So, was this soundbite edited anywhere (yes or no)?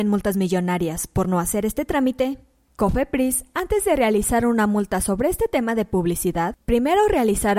no